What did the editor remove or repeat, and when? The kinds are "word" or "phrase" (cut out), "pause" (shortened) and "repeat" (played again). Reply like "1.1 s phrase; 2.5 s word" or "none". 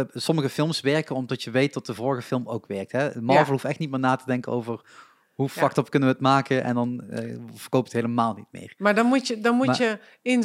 none